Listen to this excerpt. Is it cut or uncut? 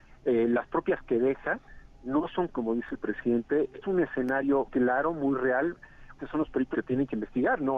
cut